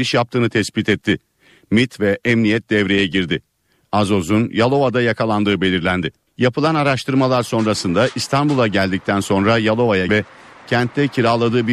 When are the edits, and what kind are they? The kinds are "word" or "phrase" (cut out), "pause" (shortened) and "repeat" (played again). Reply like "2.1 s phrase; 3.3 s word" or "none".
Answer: 10.1 s word